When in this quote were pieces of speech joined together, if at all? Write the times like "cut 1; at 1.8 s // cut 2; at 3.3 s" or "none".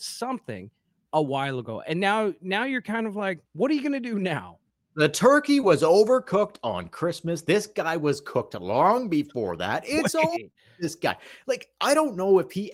cut 1; at 3.4 s

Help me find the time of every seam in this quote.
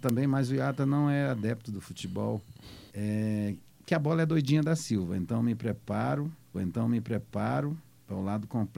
cut 1; at 2.9 s // cut 2; at 6.5 s

